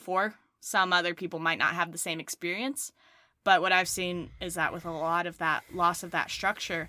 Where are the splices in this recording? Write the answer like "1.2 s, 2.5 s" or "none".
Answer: none